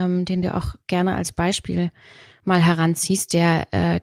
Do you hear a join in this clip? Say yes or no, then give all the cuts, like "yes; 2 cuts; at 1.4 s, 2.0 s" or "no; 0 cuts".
no; 0 cuts